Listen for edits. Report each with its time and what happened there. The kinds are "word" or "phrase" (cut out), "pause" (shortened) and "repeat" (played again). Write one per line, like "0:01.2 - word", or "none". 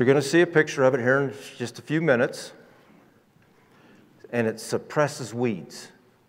none